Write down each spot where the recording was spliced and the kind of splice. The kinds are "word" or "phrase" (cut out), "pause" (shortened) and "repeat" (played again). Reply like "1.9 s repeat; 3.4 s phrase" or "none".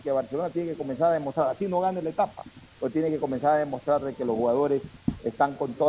none